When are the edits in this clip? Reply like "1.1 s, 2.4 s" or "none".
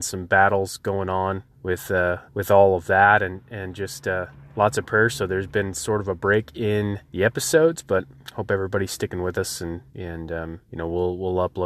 1.5 s, 2.3 s, 7.1 s, 9.9 s, 10.7 s